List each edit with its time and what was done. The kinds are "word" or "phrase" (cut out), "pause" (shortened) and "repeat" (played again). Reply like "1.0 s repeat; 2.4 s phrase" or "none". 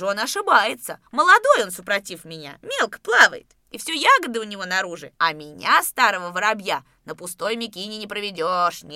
1.1 s pause; 5.1 s pause